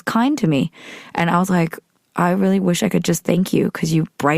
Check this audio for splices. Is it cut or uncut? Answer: uncut